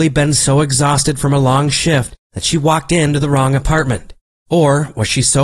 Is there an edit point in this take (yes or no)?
no